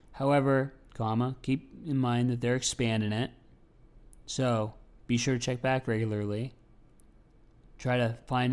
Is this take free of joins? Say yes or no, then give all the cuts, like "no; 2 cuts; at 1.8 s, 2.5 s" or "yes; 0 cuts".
yes; 0 cuts